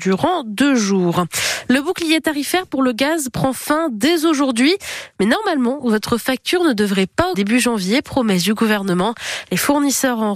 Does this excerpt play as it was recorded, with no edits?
no; 1 cut; at 7.3 s

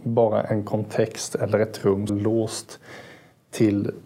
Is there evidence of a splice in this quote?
yes; 1 cut; at 2.1 s

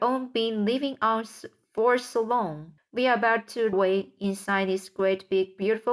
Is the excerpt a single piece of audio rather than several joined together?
no; 2 cuts; at 2.8 s, 3.7 s

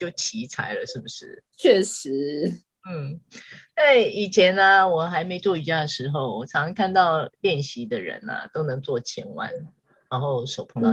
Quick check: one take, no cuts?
yes; 0 cuts

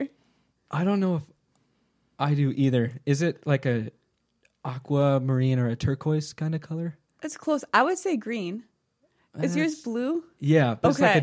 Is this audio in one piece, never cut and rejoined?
yes; 0 cuts

